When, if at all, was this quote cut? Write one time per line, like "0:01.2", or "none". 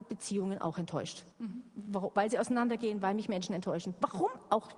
0:01.3